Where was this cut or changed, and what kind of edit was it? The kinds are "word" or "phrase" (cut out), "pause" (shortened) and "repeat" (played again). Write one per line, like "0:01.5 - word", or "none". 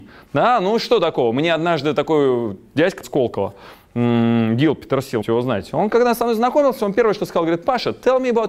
0:03.0 - word
0:05.2 - word